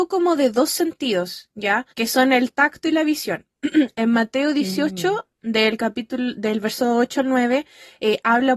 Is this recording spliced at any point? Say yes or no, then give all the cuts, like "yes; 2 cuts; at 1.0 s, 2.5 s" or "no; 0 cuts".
yes; 1 cut; at 1.9 s